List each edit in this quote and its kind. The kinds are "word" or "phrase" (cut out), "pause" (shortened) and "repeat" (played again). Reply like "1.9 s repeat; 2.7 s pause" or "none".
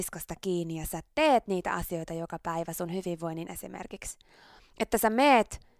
3.5 s word